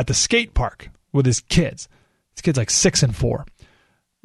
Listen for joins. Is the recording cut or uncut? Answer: uncut